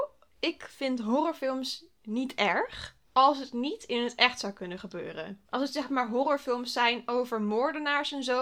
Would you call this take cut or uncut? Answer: cut